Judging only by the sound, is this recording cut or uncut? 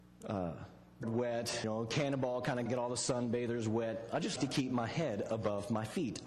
cut